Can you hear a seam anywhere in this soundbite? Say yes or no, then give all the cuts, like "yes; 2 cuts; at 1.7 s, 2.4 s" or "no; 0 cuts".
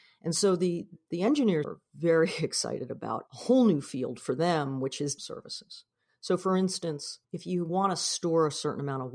yes; 4 cuts; at 1.6 s, 3.3 s, 5.2 s, 7.2 s